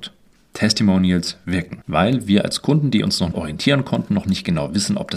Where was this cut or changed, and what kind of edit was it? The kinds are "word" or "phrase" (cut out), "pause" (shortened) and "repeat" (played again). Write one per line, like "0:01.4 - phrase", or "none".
0:03.3 - word